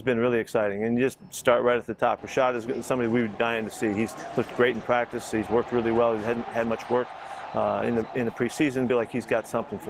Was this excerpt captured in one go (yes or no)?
no